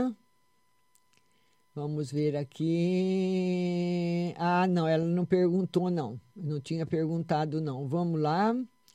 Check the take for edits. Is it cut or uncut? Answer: uncut